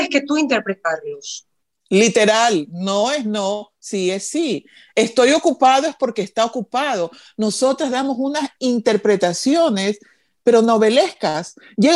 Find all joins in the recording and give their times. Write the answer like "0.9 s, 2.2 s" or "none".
none